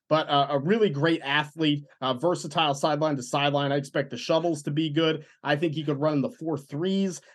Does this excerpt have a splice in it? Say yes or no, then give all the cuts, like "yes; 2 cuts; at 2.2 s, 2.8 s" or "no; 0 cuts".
no; 0 cuts